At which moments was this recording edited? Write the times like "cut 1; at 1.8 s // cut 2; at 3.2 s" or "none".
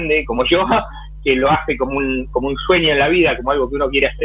none